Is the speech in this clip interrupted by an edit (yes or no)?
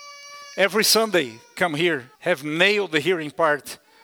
yes